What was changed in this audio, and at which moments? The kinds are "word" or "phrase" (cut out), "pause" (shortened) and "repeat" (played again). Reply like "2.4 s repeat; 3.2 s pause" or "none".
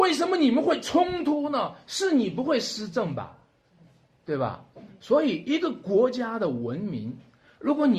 none